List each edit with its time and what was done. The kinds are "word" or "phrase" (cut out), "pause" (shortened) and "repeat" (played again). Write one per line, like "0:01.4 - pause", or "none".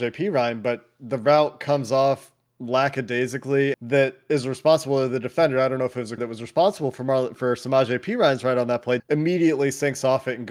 0:03.7 - phrase
0:06.2 - word
0:07.4 - word
0:09.0 - word